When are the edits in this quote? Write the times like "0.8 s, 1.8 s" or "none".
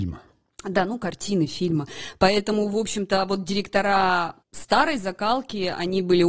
4.4 s

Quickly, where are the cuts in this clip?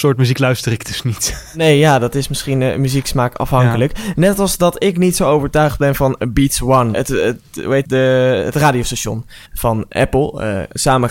6.9 s, 7.8 s, 9.4 s

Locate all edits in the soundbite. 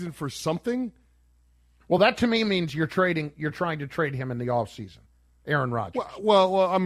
none

